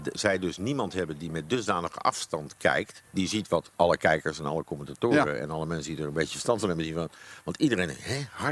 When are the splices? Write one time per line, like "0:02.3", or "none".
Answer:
0:03.0